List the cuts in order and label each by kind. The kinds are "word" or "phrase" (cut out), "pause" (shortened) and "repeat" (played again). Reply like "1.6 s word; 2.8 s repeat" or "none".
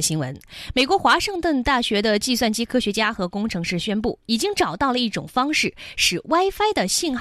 none